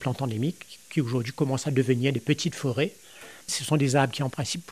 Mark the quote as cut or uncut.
cut